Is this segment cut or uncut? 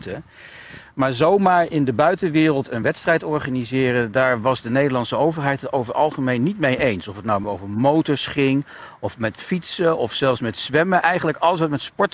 uncut